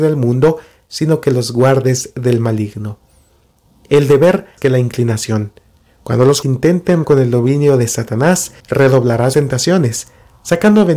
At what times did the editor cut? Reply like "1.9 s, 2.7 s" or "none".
4.6 s, 6.4 s, 7.0 s, 8.6 s, 9.3 s